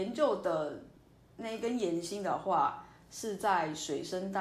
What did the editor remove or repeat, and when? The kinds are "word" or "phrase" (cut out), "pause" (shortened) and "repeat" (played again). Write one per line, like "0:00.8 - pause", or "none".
none